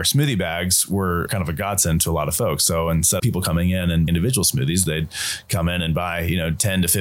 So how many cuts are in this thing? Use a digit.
3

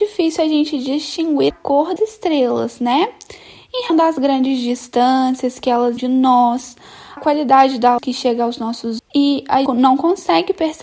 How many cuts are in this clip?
8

